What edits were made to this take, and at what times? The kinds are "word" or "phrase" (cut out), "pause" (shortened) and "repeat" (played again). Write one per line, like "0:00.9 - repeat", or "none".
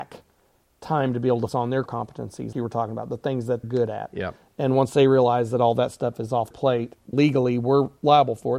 0:01.5 - word
0:01.9 - word
0:02.5 - word
0:03.6 - word
0:06.5 - word
0:07.1 - word